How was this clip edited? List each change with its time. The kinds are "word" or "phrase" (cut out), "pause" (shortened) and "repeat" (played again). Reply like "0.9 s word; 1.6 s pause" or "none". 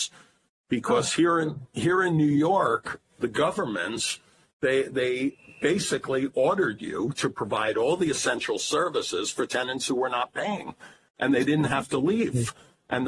none